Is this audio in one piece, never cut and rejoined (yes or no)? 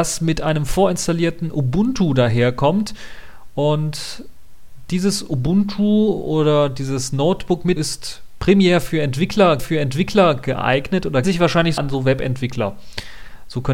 no